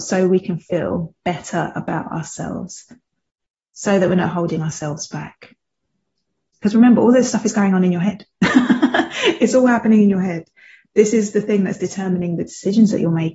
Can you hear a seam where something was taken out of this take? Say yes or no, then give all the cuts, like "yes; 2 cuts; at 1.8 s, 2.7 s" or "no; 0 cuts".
no; 0 cuts